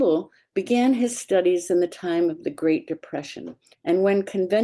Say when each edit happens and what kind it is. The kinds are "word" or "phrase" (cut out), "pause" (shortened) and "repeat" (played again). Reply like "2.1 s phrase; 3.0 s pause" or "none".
3.7 s pause